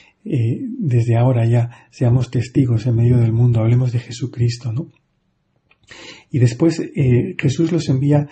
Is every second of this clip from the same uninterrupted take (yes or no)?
yes